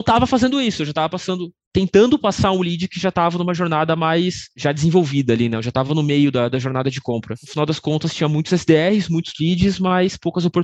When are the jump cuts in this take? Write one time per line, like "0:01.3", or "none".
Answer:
none